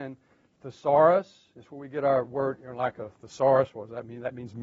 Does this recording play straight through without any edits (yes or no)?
yes